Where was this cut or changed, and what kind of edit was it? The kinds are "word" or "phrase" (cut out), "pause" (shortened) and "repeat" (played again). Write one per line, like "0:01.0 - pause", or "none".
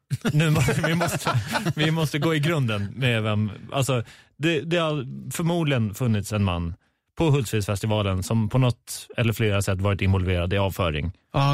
none